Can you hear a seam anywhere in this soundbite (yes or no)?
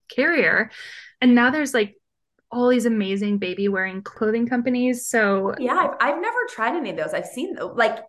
no